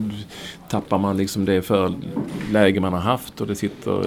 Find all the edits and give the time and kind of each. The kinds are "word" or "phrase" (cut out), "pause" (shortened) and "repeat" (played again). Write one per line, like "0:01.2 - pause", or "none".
none